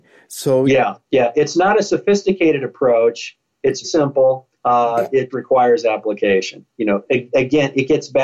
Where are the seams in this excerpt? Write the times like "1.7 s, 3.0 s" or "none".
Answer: 1.0 s, 3.8 s, 4.5 s, 5.3 s